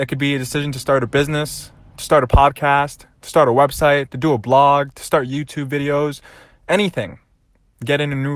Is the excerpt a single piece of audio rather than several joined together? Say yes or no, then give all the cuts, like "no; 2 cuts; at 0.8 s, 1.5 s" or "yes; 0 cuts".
yes; 0 cuts